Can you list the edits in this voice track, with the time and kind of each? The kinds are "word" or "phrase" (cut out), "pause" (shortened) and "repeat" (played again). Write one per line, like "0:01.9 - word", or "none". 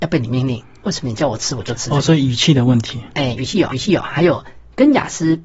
0:03.7 - repeat